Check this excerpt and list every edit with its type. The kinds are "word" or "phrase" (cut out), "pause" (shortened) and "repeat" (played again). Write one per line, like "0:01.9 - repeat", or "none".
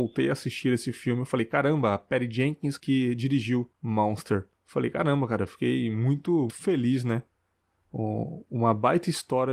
0:02.8 - word
0:04.6 - pause
0:06.5 - word